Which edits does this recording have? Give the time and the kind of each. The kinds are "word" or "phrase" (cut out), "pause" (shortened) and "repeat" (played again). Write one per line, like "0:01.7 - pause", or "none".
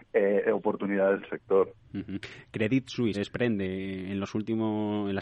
0:01.2 - word
0:03.1 - word